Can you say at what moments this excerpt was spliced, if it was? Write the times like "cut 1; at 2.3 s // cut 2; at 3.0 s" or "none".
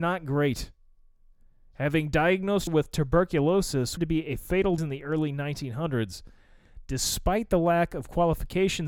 cut 1; at 2.7 s // cut 2; at 4.0 s // cut 3; at 4.8 s